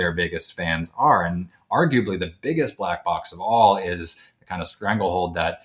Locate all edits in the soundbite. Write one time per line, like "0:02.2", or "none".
none